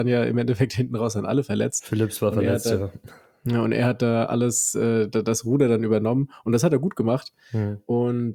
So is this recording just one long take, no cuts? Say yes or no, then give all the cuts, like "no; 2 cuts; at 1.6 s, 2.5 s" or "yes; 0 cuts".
yes; 0 cuts